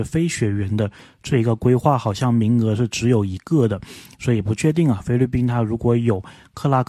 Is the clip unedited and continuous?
yes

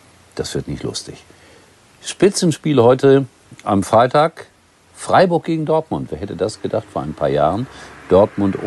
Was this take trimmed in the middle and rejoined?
no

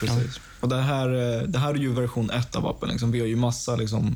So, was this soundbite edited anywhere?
no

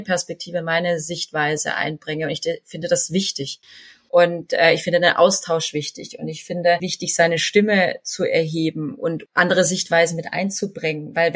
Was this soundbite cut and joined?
no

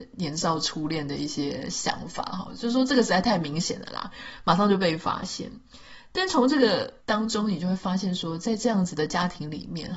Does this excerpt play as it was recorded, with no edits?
no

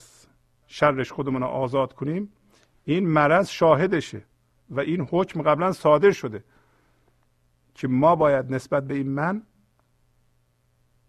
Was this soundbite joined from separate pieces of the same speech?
no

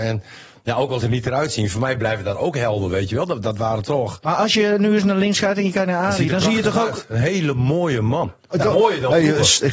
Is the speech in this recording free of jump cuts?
no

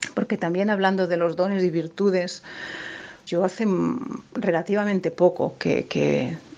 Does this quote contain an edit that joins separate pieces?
yes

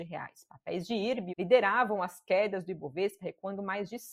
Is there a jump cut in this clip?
yes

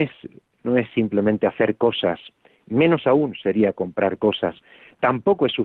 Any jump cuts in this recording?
no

